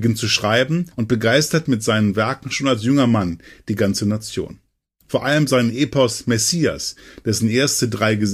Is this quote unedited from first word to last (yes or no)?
no